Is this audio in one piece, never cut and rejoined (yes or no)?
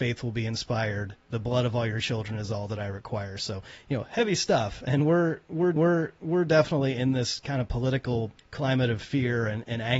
no